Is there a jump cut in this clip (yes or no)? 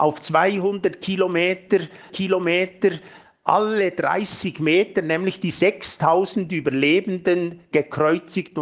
yes